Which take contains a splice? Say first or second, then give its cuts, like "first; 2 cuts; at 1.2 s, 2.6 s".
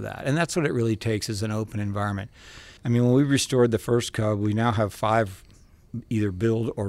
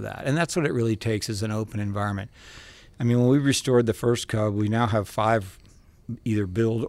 first; 1 cut; at 2.8 s